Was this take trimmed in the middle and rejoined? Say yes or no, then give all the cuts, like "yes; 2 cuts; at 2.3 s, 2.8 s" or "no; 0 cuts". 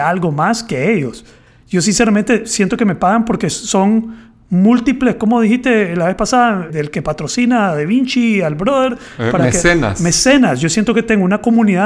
yes; 1 cut; at 6.7 s